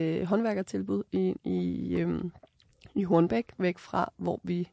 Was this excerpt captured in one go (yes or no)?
no